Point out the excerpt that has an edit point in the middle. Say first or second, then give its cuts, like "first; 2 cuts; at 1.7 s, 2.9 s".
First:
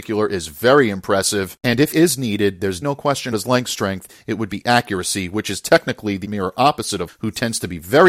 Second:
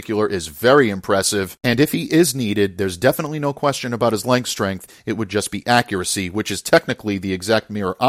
first; 6 cuts; at 1.9 s, 2.8 s, 3.3 s, 4.5 s, 6.2 s, 7.1 s